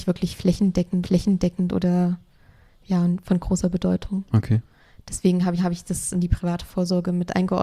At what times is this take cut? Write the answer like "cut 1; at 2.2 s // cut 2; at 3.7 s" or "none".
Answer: cut 1; at 1.0 s // cut 2; at 5.6 s // cut 3; at 6.1 s